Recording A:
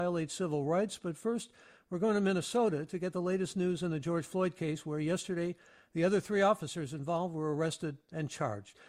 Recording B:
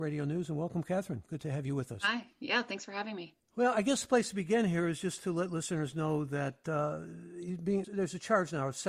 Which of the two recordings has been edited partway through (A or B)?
B